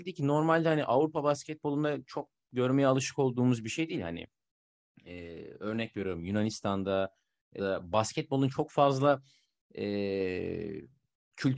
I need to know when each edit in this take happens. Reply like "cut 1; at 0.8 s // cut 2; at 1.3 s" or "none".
cut 1; at 7.6 s

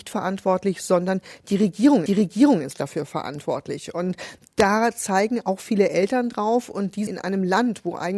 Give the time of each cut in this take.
cut 1; at 2.1 s // cut 2; at 7.1 s

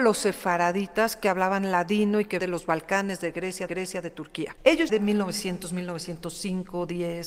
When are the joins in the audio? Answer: cut 1; at 2.4 s // cut 2; at 3.7 s // cut 3; at 4.9 s

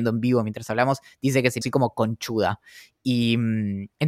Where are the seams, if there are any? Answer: cut 1; at 1.6 s

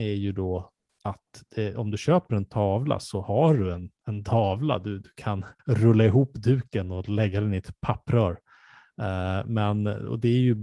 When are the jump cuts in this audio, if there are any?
cut 1; at 5.6 s

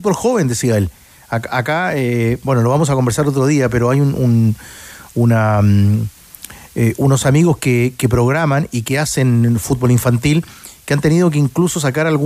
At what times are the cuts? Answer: none

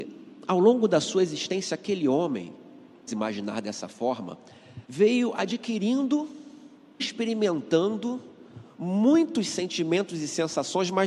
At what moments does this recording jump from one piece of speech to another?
cut 1; at 3.1 s // cut 2; at 4.8 s // cut 3; at 7.0 s

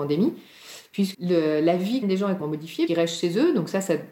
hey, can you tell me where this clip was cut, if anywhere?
cut 1; at 1.1 s // cut 2; at 2.0 s // cut 3; at 2.4 s // cut 4; at 2.9 s

